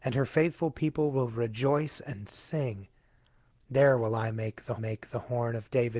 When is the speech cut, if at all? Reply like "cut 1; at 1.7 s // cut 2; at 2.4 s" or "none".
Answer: cut 1; at 4.8 s

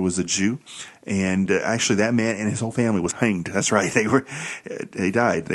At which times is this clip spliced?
none

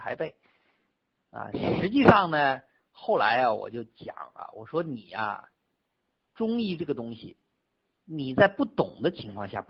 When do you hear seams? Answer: none

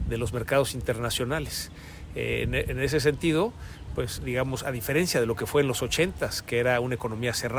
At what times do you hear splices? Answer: cut 1; at 4.2 s

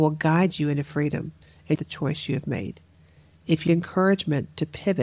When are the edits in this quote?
cut 1; at 1.7 s // cut 2; at 3.7 s

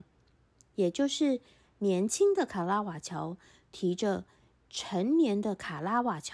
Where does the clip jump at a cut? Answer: none

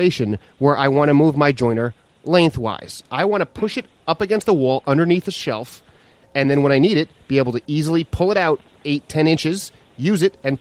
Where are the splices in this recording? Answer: none

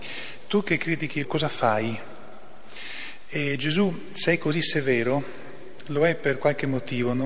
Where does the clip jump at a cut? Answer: cut 1; at 1.2 s

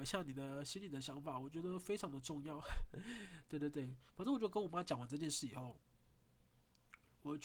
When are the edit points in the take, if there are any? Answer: cut 1; at 4.1 s

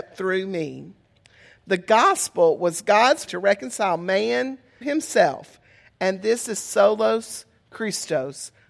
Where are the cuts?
cut 1; at 3.3 s // cut 2; at 4.8 s

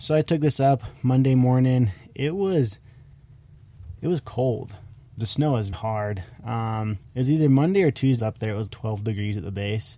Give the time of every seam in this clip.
cut 1; at 5.7 s // cut 2; at 7.1 s // cut 3; at 8.2 s // cut 4; at 8.7 s

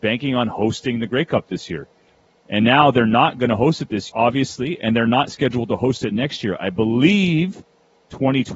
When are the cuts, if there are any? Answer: cut 1; at 2.3 s // cut 2; at 4.1 s

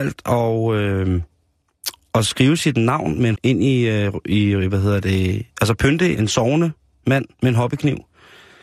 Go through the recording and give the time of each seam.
cut 1; at 3.3 s // cut 2; at 6.1 s // cut 3; at 7.3 s

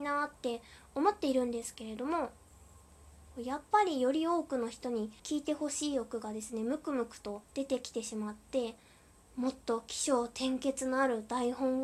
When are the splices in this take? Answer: cut 1; at 5.2 s // cut 2; at 7.4 s

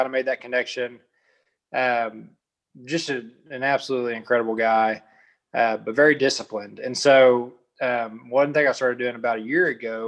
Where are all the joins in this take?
none

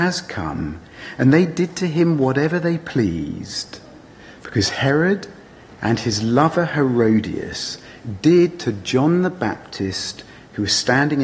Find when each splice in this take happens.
none

